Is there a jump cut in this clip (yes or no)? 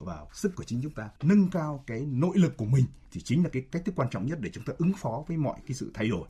yes